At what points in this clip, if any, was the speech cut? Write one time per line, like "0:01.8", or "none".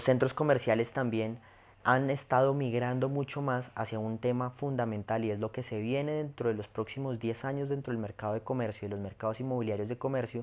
none